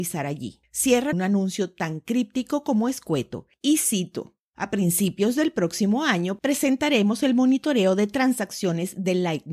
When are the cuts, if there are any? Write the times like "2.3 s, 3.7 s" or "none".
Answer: 1.1 s